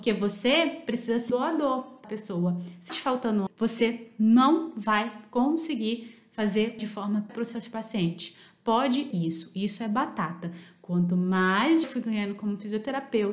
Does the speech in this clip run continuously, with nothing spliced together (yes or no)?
no